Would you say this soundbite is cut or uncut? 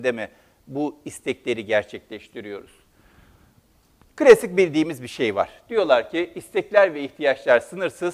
uncut